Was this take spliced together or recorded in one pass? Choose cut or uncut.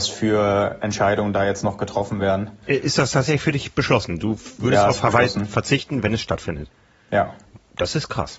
uncut